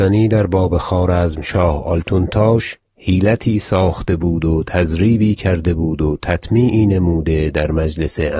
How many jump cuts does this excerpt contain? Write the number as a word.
one